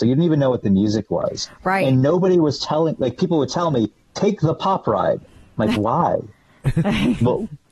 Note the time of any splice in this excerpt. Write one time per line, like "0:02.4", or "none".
0:05.8